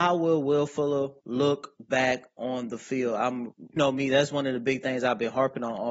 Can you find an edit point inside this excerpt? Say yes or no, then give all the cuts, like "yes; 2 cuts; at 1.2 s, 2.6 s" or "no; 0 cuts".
yes; 2 cuts; at 1.2 s, 3.8 s